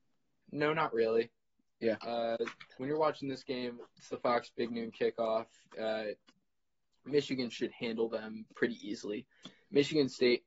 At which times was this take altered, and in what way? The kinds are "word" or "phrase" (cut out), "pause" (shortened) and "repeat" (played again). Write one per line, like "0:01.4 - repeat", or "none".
none